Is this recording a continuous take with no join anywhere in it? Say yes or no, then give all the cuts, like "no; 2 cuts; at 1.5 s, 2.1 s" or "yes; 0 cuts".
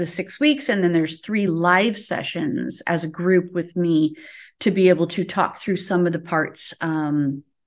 yes; 0 cuts